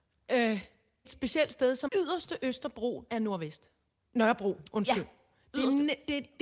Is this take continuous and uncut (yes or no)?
no